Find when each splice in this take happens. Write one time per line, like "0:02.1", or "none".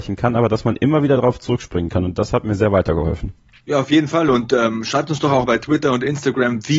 0:03.4
0:05.5